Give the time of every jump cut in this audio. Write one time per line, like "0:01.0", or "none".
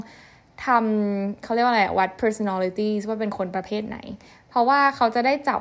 none